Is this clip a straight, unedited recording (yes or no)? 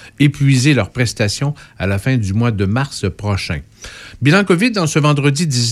yes